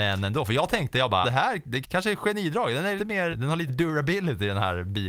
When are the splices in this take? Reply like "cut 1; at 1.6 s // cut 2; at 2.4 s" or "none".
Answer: cut 1; at 1.2 s // cut 2; at 1.8 s // cut 3; at 3.0 s // cut 4; at 3.3 s // cut 5; at 3.7 s